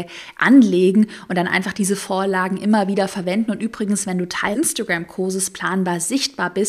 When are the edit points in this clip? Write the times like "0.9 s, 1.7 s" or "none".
4.5 s